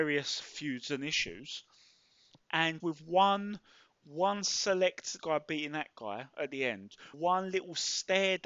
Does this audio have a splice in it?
yes; 3 cuts; at 2.8 s, 5.2 s, 7.1 s

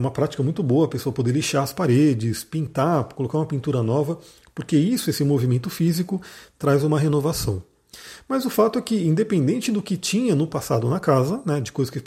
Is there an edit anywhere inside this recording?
no; 0 cuts

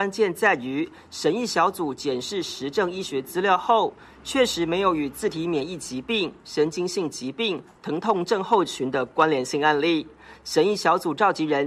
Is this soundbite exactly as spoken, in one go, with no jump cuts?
yes; 0 cuts

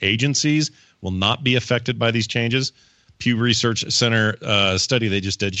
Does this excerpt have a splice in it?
no; 0 cuts

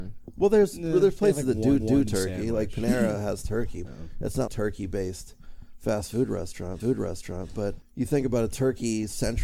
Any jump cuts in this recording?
yes; 4 cuts; at 1.8 s, 3.8 s, 4.5 s, 6.8 s

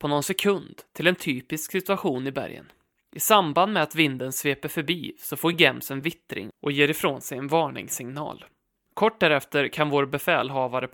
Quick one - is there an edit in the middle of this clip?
no; 0 cuts

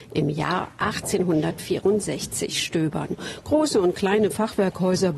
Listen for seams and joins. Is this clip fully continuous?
yes; 0 cuts

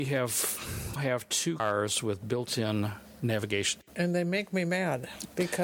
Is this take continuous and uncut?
no; 2 cuts; at 1.0 s, 1.6 s

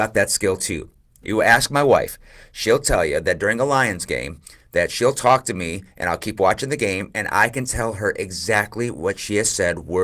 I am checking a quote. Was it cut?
no; 0 cuts

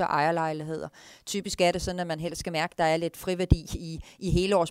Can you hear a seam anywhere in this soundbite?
no; 0 cuts

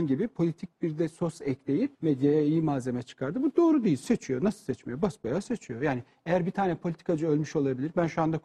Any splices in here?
yes; 1 cut; at 1.9 s

